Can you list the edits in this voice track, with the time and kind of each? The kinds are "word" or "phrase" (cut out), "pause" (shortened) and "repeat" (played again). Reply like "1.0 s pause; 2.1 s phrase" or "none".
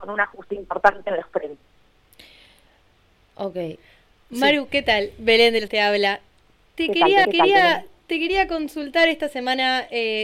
5.7 s word; 7.2 s repeat